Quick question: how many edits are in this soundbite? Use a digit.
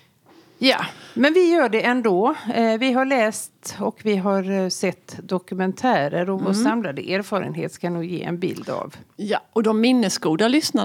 0